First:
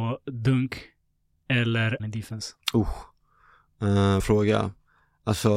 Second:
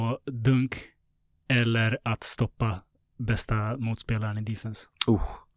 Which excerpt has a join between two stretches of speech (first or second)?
first